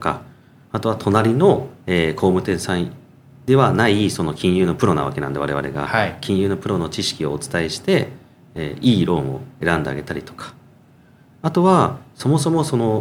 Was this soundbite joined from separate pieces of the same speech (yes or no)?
no